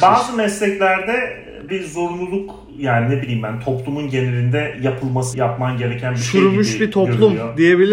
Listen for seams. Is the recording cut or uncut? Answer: cut